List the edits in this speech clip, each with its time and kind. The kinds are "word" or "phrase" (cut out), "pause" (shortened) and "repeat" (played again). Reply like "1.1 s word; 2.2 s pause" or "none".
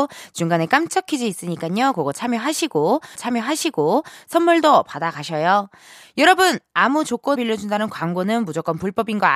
3.1 s repeat; 7.3 s word